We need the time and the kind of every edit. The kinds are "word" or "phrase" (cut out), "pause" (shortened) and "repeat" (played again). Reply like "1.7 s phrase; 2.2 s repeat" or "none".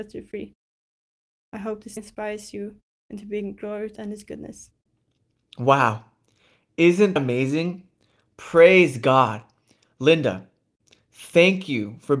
2.0 s word; 4.0 s word; 7.2 s word